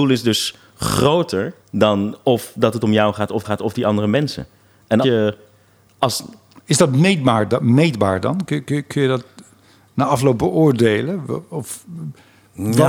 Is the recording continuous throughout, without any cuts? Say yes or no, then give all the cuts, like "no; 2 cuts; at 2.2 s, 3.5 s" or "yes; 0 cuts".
no; 3 cuts; at 1.6 s, 3.4 s, 5.0 s